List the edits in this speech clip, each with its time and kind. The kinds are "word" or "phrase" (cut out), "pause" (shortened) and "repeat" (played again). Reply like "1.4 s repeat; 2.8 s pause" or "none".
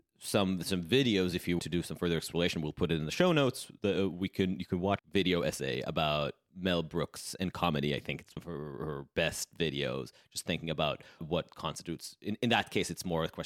1.6 s word; 5.0 s word; 8.4 s word; 11.2 s word